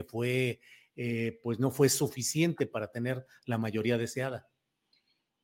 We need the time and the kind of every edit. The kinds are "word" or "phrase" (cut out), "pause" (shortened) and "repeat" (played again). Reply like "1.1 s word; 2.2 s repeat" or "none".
none